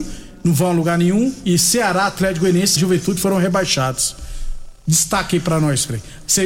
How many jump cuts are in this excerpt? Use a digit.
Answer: 1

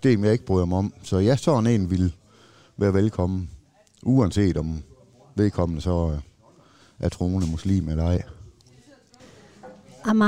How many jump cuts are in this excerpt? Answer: 0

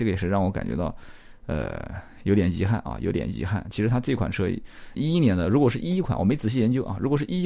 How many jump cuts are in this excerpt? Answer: 1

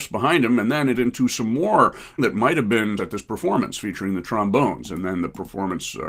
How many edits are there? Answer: 3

